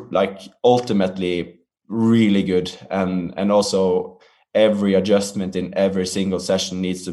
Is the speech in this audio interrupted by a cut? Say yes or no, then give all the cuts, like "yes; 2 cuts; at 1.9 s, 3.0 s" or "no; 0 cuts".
no; 0 cuts